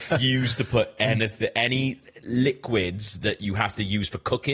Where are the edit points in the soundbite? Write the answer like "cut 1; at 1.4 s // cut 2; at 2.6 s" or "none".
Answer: none